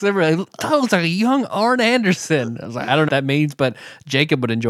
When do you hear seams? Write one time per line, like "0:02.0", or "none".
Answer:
0:03.1